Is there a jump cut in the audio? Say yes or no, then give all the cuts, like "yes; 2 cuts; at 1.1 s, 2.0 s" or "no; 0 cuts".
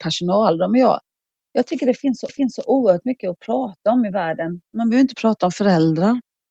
yes; 2 cuts; at 2.3 s, 4.7 s